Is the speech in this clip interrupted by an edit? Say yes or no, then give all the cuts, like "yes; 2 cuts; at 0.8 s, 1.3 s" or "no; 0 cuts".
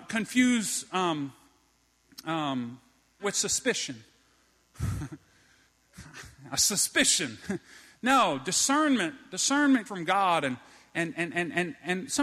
yes; 3 cuts; at 3.2 s, 9.9 s, 11.1 s